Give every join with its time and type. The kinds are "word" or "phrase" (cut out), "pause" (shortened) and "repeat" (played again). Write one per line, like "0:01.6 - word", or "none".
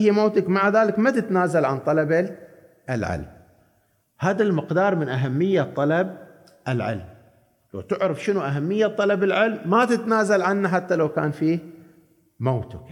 none